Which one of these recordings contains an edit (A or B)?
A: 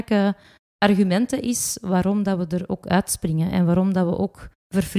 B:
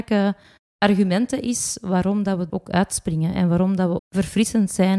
B